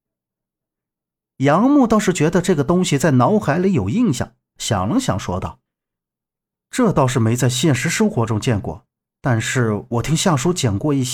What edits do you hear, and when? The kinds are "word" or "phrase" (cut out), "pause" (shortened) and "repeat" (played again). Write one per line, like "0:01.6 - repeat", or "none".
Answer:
none